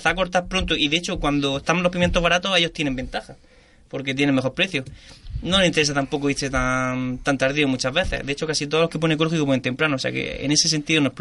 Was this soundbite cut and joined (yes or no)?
no